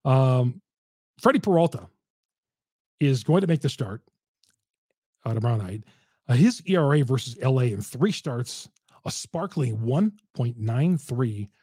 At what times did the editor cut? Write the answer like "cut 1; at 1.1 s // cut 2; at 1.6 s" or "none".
none